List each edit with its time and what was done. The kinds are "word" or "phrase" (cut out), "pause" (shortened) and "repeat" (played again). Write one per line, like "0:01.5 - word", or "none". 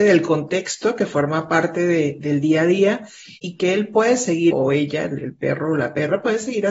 0:03.4 - pause
0:04.5 - word